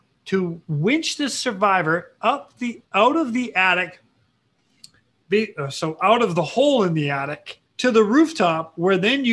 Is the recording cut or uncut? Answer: cut